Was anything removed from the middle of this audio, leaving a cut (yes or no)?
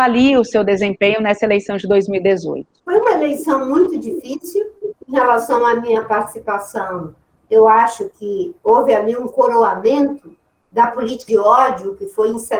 yes